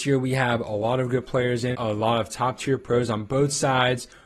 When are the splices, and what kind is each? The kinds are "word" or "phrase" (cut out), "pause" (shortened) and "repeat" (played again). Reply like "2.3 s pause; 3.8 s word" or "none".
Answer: 1.7 s word